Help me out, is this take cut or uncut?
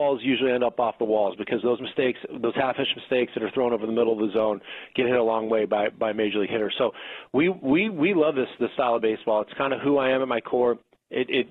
uncut